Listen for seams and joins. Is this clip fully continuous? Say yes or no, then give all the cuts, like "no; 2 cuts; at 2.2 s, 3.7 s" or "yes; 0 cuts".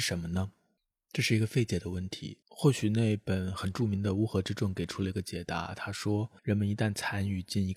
no; 2 cuts; at 2.4 s, 6.4 s